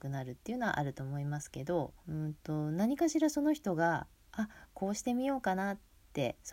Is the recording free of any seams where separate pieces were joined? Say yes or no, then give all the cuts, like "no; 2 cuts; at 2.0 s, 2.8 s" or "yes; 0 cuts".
no; 1 cut; at 2.0 s